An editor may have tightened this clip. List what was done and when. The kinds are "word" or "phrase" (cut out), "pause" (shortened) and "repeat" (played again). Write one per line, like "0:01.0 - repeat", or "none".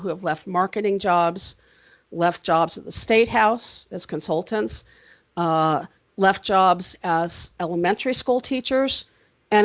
none